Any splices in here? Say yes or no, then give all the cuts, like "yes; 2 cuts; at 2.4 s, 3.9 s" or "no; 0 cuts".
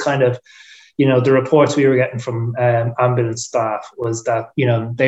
no; 0 cuts